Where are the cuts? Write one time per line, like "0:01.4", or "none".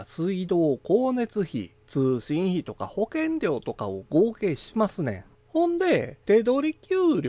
0:01.8
0:05.3
0:06.2